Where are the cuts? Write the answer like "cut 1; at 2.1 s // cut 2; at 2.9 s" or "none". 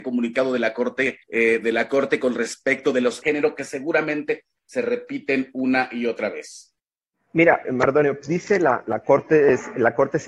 cut 1; at 1.2 s // cut 2; at 3.2 s // cut 3; at 7.6 s // cut 4; at 8.2 s